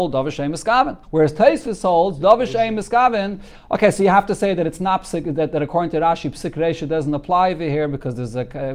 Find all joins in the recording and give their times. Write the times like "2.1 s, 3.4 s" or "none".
1.0 s